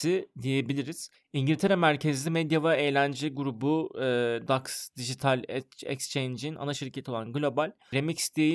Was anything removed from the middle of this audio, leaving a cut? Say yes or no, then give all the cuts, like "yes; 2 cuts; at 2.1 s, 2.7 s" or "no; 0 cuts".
no; 0 cuts